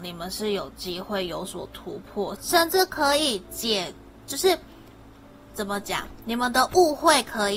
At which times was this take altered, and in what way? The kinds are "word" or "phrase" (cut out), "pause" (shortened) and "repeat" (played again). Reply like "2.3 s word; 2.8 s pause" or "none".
2.4 s phrase